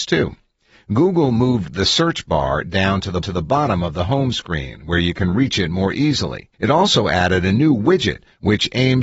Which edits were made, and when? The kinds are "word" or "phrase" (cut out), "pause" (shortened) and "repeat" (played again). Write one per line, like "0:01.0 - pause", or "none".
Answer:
0:03.2 - repeat
0:06.5 - pause